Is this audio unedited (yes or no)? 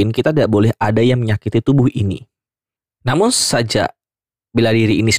no